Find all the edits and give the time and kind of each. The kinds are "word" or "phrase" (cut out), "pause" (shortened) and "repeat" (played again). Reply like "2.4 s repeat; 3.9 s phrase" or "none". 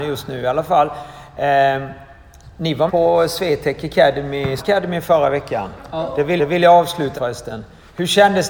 2.9 s word; 4.6 s word; 6.4 s repeat; 7.2 s word